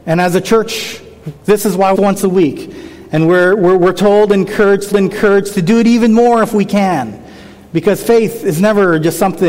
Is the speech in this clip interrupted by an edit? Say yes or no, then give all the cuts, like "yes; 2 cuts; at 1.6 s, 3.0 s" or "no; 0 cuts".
yes; 3 cuts; at 1.4 s, 1.9 s, 4.9 s